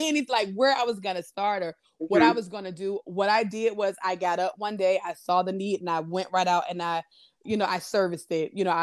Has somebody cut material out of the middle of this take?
no; 0 cuts

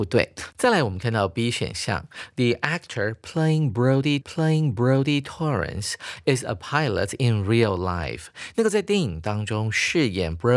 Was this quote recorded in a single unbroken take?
no; 1 cut; at 4.2 s

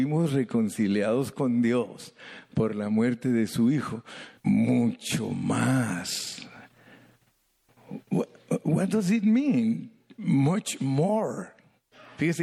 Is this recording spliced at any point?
yes; 1 cut; at 4.4 s

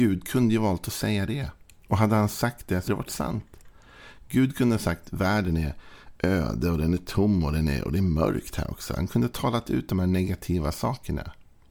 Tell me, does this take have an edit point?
yes; 1 cut; at 2.9 s

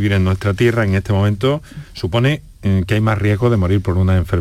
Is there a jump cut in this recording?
no; 0 cuts

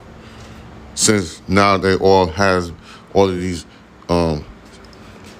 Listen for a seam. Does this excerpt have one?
no; 0 cuts

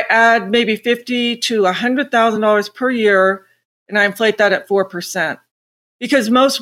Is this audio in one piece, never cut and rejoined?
yes; 0 cuts

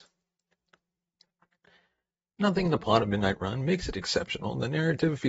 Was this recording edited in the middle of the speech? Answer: no; 0 cuts

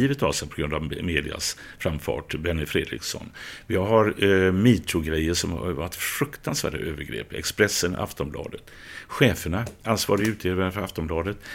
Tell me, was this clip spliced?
no; 0 cuts

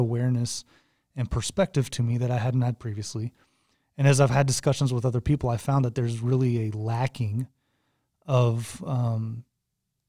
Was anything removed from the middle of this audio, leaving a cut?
no; 0 cuts

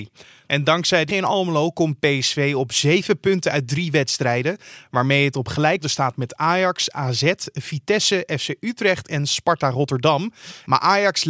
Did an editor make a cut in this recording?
yes; 2 cuts; at 1.1 s, 5.8 s

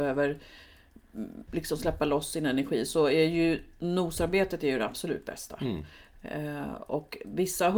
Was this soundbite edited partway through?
no; 0 cuts

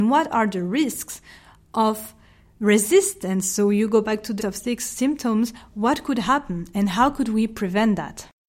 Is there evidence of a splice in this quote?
yes; 1 cut; at 4.4 s

